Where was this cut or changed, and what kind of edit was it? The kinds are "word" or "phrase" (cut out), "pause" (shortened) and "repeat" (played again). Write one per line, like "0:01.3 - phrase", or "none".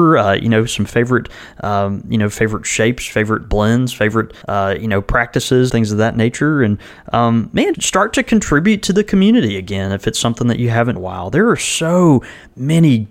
0:04.4 - pause
0:05.7 - word
0:07.7 - word
0:11.0 - phrase